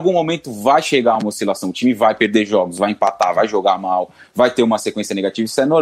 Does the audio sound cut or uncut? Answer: uncut